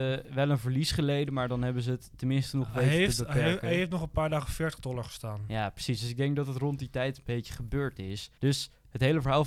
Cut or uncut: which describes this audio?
cut